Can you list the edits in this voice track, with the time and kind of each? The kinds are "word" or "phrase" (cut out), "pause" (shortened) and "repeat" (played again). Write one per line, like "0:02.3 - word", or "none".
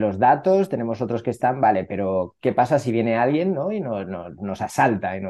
none